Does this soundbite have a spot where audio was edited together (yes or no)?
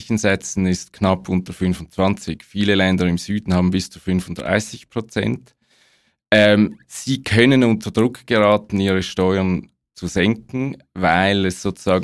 no